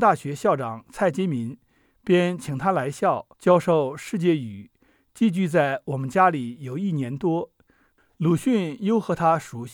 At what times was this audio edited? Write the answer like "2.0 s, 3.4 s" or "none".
3.3 s